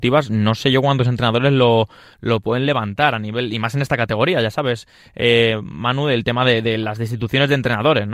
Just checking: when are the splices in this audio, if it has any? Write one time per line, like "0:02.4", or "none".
none

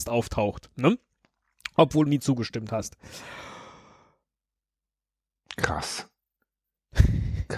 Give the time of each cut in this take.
0:02.1

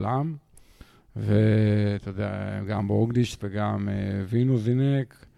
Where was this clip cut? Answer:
0:03.4

